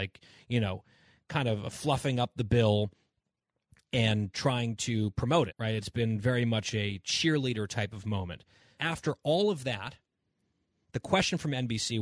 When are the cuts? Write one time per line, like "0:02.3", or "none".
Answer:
0:05.5
0:08.8